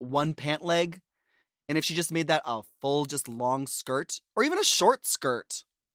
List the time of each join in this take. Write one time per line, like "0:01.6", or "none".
none